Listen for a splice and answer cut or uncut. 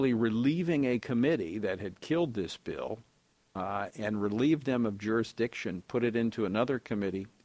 uncut